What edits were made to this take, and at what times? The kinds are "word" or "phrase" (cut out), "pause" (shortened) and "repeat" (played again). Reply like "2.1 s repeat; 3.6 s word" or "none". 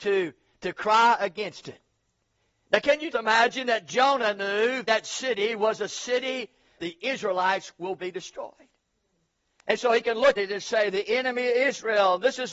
3.1 s word; 4.8 s word; 6.8 s word; 10.4 s word